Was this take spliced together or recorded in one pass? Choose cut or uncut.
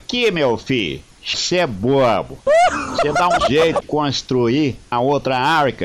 cut